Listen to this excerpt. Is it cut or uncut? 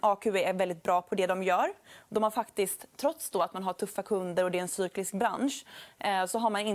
uncut